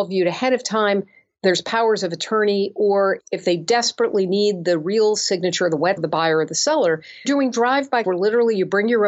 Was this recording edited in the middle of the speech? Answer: yes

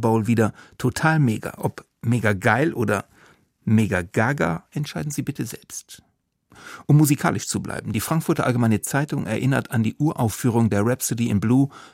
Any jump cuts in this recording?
no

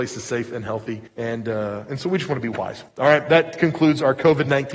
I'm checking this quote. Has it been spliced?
yes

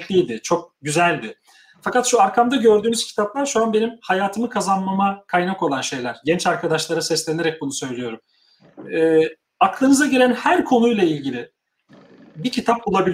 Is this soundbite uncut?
yes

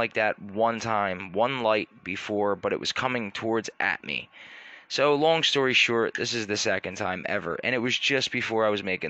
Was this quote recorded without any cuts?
yes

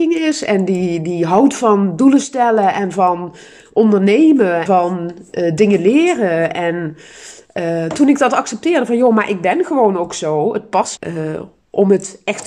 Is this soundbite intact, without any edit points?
no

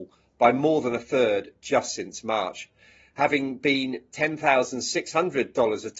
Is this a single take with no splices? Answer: yes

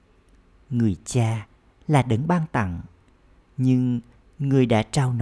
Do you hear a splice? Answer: no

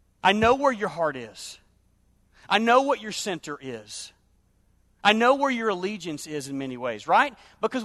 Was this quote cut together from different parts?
no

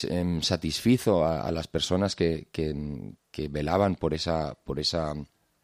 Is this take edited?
no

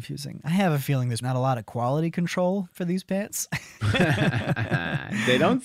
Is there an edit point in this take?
yes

